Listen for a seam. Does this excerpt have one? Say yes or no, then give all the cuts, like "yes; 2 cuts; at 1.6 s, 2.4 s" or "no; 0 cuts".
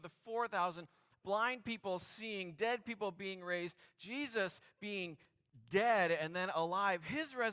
no; 0 cuts